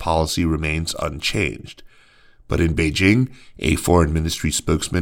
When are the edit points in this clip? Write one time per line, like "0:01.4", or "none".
none